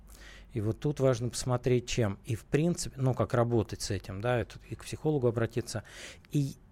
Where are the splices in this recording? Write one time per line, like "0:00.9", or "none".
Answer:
none

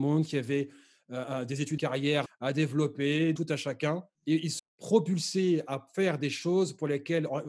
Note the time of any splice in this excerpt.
0:01.8
0:02.3
0:03.4
0:04.1
0:04.6

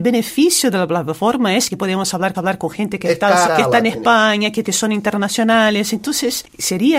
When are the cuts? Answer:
0:01.7
0:02.3
0:03.4
0:04.6

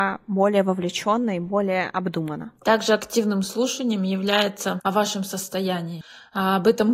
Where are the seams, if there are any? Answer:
0:02.6
0:04.8

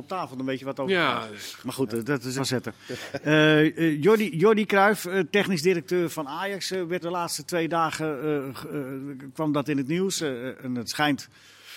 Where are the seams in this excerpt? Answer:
0:02.4
0:07.0

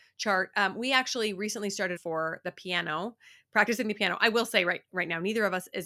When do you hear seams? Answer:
0:02.0

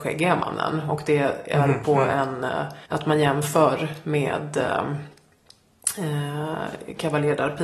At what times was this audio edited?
0:02.9

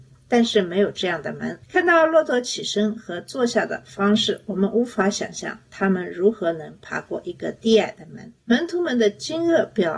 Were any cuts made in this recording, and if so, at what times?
0:01.6
0:08.4

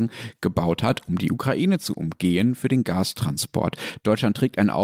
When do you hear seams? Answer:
none

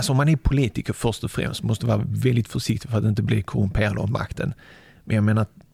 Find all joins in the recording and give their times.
none

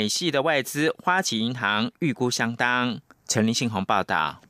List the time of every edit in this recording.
none

